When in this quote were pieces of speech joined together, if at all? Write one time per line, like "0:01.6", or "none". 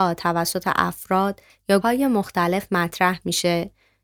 0:01.8

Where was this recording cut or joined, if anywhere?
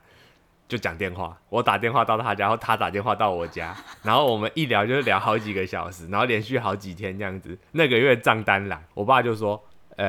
0:01.4
0:07.7
0:08.9

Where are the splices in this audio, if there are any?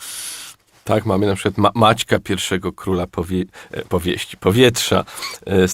0:03.9

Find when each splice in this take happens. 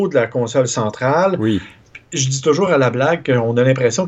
none

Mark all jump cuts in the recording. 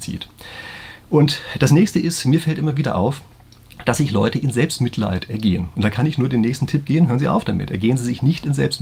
none

